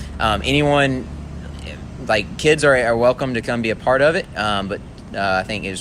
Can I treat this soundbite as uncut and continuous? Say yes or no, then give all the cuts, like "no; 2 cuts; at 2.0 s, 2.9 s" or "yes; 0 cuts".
yes; 0 cuts